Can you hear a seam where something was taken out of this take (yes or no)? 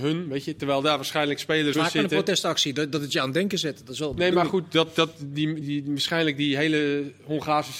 yes